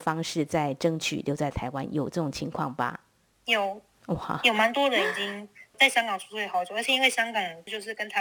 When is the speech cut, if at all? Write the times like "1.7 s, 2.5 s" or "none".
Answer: none